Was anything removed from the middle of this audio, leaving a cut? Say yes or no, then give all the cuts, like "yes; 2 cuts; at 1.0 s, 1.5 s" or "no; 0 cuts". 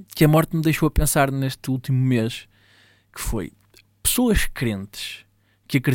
no; 0 cuts